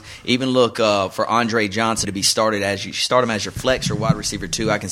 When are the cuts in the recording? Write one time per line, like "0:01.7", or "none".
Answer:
0:02.0